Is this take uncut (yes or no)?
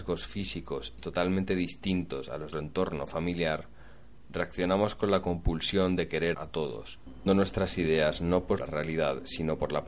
no